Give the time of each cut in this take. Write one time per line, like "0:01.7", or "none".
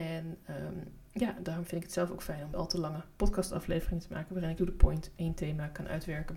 0:02.5
0:04.6

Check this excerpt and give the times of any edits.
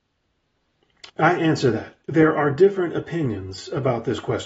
0:01.1

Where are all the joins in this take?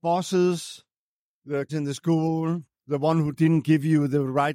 0:01.7
0:02.7

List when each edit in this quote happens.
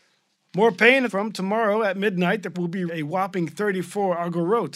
0:01.1
0:02.5
0:02.9

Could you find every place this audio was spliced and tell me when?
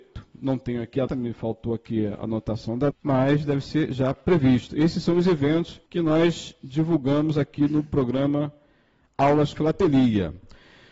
0:01.1
0:02.9
0:05.9
0:09.5

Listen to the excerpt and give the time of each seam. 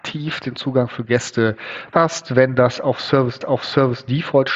0:01.9
0:03.4

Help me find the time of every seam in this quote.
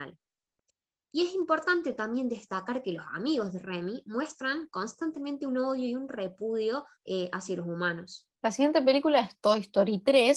0:06.9
0:08.3

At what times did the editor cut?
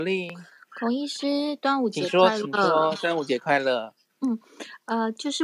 none

